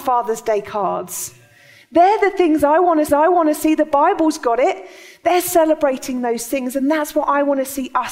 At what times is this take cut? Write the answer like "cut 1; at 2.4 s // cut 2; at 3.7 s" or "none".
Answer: cut 1; at 3.1 s

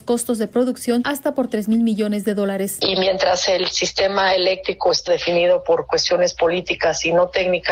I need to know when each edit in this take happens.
cut 1; at 5.1 s

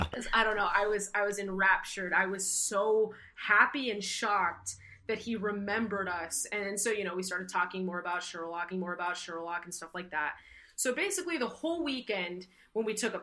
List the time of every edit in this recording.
cut 1; at 8.7 s

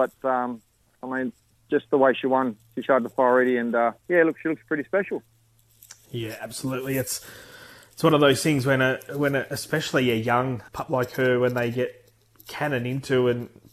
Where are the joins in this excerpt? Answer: cut 1; at 4.0 s // cut 2; at 10.7 s

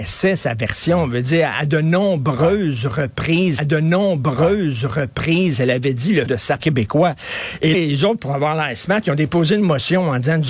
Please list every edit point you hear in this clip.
cut 1; at 3.6 s // cut 2; at 6.3 s // cut 3; at 6.6 s // cut 4; at 7.7 s

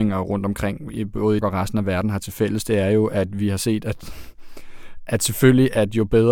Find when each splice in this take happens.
cut 1; at 1.4 s

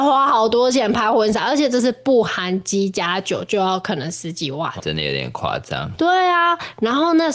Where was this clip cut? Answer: cut 1; at 4.8 s

